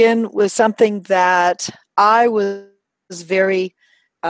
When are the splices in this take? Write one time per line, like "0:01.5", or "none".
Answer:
none

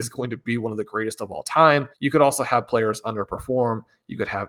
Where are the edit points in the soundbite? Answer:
0:01.9

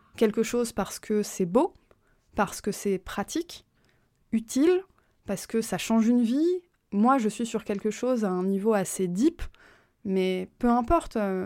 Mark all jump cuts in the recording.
none

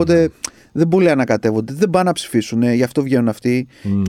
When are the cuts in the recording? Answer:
none

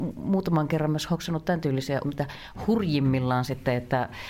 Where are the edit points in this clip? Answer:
0:02.0

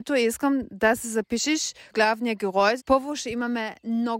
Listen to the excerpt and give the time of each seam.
0:01.9
0:02.8

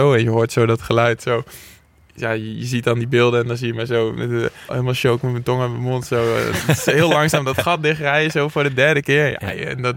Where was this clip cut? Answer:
0:01.2
0:04.7

